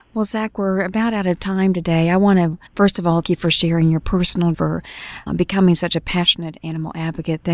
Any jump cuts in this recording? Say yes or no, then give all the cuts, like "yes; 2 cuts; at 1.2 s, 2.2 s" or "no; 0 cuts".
yes; 4 cuts; at 2.7 s, 3.2 s, 4.5 s, 5.3 s